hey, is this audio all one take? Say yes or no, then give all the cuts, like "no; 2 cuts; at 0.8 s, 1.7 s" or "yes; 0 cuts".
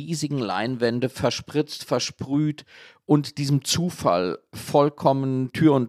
yes; 0 cuts